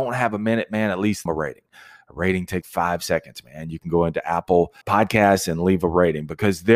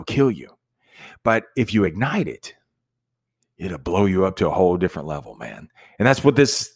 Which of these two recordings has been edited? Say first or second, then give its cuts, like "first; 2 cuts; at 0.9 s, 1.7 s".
first; 3 cuts; at 1.3 s, 2.6 s, 4.8 s